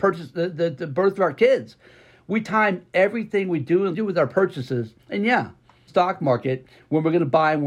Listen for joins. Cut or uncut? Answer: cut